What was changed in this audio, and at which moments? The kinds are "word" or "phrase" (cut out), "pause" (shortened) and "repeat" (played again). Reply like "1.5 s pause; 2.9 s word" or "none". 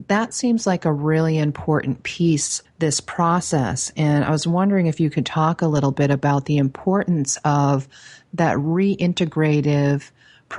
2.6 s word